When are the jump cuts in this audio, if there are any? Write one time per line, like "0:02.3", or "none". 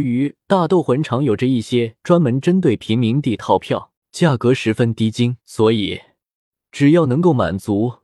0:04.0
0:05.4